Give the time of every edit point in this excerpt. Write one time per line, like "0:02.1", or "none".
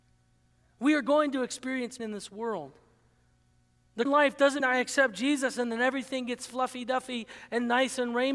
0:02.0
0:04.0
0:04.6